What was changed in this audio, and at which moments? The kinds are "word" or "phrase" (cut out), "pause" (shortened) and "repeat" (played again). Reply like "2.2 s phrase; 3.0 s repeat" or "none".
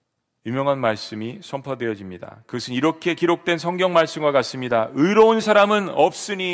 none